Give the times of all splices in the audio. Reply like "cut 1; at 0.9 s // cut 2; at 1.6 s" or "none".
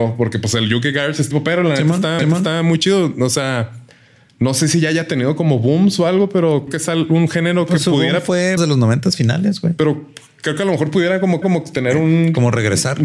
cut 1; at 1.3 s // cut 2; at 2.2 s // cut 3; at 6.7 s // cut 4; at 8.6 s // cut 5; at 11.4 s